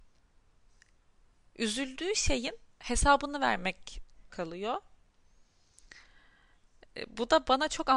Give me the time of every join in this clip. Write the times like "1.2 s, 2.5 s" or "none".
2.7 s, 4.3 s